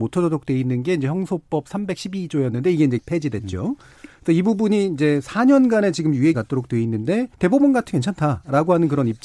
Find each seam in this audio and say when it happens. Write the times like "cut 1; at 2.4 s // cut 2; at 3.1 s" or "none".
cut 1; at 3.0 s // cut 2; at 6.3 s // cut 3; at 7.3 s // cut 4; at 7.9 s

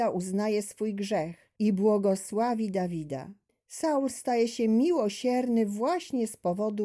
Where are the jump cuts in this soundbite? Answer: cut 1; at 1.6 s // cut 2; at 3.5 s

